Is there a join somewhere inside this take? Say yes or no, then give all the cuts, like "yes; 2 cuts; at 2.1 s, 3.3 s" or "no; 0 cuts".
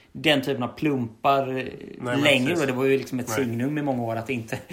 no; 0 cuts